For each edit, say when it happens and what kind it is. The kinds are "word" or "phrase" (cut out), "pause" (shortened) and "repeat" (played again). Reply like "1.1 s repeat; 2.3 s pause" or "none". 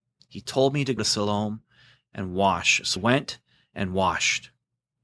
1.0 s word; 3.0 s word